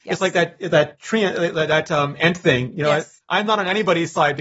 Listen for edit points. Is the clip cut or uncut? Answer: uncut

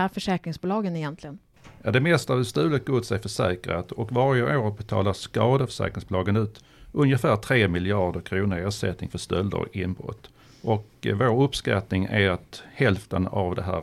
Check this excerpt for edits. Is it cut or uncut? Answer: uncut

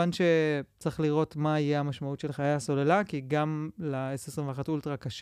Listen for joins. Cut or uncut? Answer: uncut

